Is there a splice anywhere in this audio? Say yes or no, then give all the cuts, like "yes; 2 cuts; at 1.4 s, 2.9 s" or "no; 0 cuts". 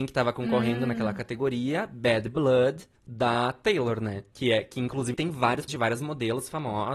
yes; 4 cuts; at 3.0 s, 4.3 s, 5.1 s, 5.7 s